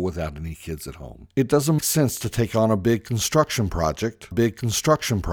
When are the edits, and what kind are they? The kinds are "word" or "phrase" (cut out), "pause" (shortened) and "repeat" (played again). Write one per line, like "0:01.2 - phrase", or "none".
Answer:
0:01.3 - pause
0:01.8 - word
0:04.3 - repeat